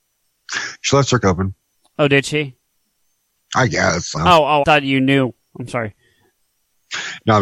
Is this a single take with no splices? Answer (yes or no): no